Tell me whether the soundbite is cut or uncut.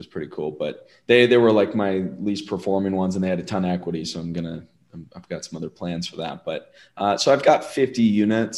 uncut